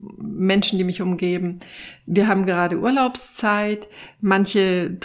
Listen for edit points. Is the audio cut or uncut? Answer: uncut